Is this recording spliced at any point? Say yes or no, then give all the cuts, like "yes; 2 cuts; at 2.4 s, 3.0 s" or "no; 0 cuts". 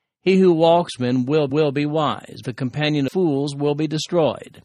yes; 4 cuts; at 1.0 s, 1.5 s, 2.4 s, 3.1 s